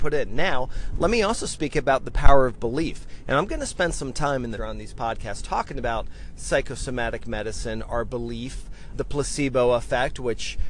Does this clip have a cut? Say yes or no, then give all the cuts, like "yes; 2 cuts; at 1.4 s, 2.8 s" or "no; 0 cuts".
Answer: yes; 2 cuts; at 4.6 s, 8.9 s